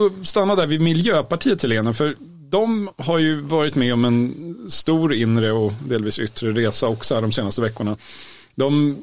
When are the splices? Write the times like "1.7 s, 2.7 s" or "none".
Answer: none